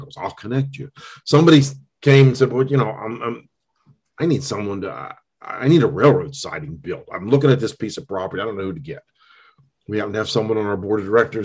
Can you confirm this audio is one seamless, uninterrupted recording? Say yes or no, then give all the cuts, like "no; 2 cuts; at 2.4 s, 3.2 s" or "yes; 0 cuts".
yes; 0 cuts